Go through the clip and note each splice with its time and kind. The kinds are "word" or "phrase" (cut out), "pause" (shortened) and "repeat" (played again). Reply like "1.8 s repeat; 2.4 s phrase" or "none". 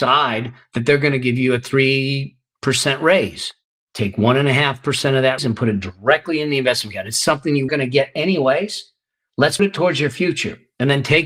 5.4 s word; 7.7 s word; 9.6 s word